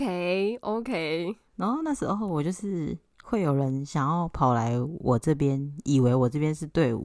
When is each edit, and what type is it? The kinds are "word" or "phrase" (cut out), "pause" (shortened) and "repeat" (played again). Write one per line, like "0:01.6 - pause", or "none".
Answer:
0:01.5 - pause